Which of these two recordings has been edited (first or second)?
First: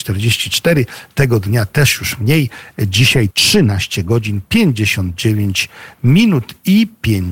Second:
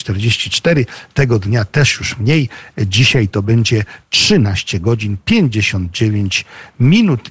first